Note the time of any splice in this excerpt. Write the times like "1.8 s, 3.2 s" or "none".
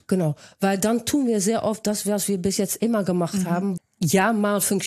3.8 s